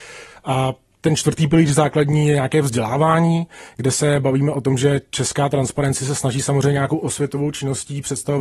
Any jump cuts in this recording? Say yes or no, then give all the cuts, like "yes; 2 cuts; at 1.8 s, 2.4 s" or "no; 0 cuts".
no; 0 cuts